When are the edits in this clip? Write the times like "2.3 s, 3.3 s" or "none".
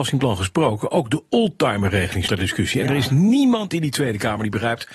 2.3 s